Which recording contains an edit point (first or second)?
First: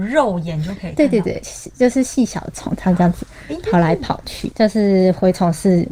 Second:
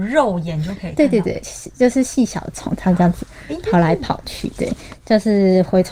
first